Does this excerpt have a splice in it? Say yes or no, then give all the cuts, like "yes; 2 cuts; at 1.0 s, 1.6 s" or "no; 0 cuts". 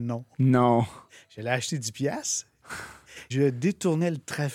yes; 1 cut; at 3.3 s